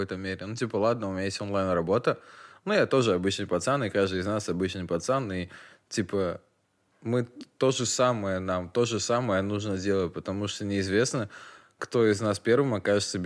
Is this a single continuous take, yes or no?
yes